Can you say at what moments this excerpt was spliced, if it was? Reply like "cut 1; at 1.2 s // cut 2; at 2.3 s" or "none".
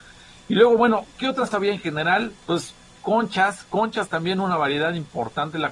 cut 1; at 1.5 s // cut 2; at 2.4 s